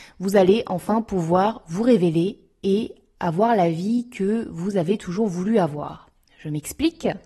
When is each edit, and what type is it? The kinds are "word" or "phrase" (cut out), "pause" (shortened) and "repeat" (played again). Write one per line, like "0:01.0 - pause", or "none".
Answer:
none